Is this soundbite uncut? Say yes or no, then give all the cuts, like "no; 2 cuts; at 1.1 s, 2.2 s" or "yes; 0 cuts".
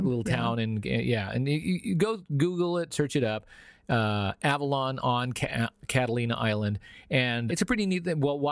no; 1 cut; at 7.5 s